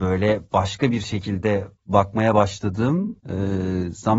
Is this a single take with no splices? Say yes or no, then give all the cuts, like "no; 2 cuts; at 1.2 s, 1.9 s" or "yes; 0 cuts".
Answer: no; 2 cuts; at 1.8 s, 3.2 s